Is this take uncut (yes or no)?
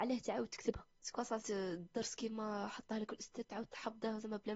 no